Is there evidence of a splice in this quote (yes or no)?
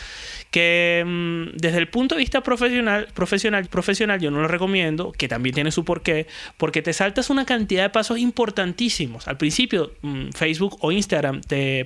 yes